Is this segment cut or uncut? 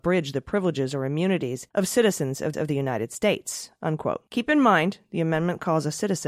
cut